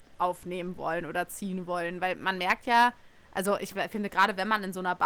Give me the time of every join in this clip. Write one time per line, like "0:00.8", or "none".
none